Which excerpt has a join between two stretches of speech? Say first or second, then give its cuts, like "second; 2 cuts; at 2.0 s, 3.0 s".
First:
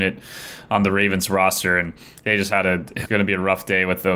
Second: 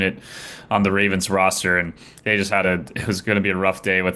first; 1 cut; at 3.1 s